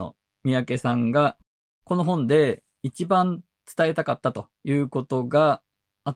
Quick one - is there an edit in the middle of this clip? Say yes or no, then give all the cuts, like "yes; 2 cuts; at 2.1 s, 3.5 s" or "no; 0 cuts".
yes; 1 cut; at 4.5 s